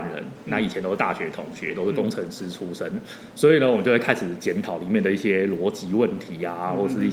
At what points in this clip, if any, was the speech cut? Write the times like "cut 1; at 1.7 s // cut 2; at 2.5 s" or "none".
none